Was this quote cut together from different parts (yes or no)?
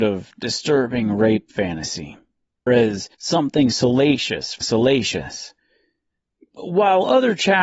yes